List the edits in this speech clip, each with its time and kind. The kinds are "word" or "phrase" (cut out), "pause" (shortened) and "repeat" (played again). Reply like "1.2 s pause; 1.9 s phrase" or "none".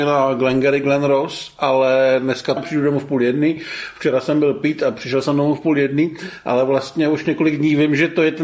2.6 s word